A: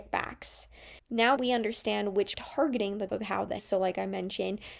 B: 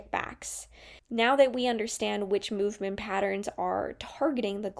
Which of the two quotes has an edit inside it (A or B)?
A